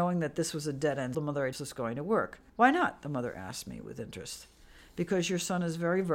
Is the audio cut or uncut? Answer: cut